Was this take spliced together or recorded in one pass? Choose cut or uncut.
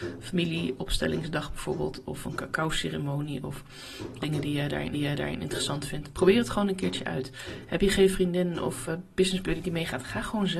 cut